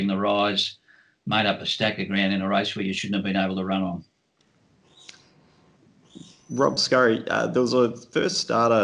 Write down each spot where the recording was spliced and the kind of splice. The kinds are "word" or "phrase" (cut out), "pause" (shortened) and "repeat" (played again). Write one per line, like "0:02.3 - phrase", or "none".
none